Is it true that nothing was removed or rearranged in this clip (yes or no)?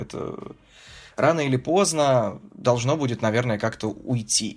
yes